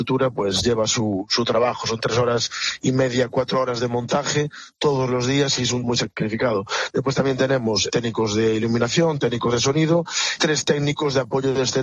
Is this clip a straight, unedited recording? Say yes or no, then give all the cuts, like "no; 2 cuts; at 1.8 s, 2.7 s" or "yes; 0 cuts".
no; 3 cuts; at 5.8 s, 7.9 s, 10.4 s